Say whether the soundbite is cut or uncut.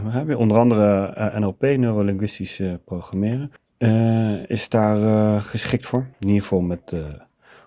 cut